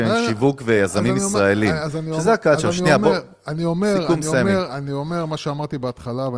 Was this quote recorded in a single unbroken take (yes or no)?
yes